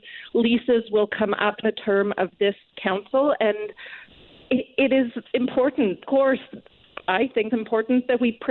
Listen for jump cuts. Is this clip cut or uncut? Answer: cut